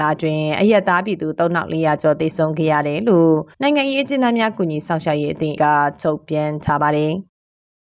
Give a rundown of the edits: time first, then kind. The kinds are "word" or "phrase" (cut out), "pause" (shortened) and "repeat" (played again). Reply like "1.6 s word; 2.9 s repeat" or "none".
3.5 s pause; 5.6 s word